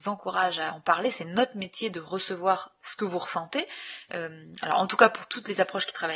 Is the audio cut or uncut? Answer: uncut